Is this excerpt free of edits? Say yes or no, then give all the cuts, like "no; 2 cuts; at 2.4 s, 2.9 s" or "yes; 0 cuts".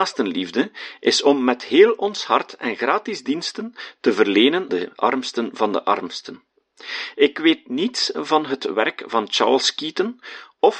no; 1 cut; at 4.7 s